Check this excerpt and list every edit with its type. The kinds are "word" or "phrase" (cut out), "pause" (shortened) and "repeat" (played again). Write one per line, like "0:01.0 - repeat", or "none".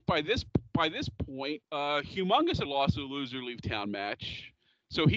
0:01.6 - pause
0:02.6 - word